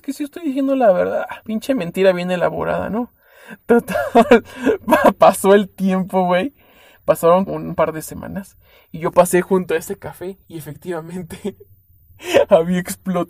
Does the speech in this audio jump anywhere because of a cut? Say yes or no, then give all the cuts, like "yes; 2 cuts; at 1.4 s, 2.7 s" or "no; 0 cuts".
yes; 3 cuts; at 1.4 s, 7.5 s, 10.4 s